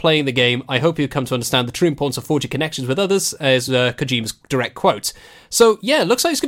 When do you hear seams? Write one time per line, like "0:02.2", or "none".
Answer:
none